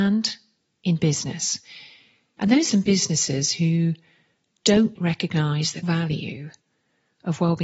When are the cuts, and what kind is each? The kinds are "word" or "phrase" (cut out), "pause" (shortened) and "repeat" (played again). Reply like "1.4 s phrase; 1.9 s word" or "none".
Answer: 2.7 s word; 5.0 s word; 5.8 s word